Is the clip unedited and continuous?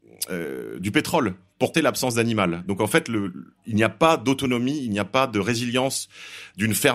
no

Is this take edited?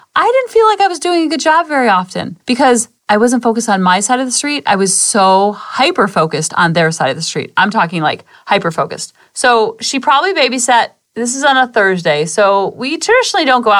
yes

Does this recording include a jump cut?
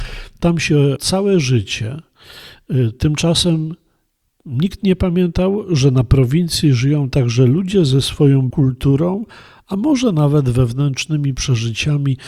yes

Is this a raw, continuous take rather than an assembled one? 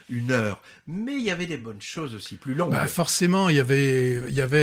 yes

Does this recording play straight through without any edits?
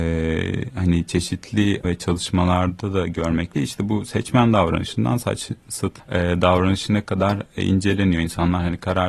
no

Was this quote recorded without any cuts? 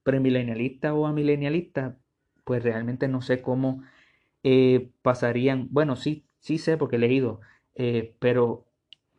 yes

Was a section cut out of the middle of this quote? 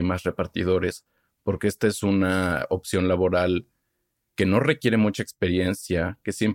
no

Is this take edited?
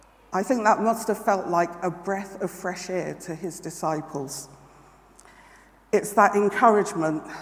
no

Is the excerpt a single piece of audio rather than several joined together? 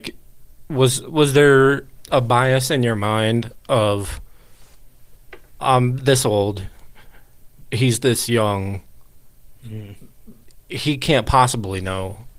yes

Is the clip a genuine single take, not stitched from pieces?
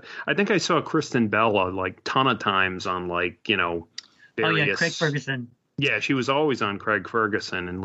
yes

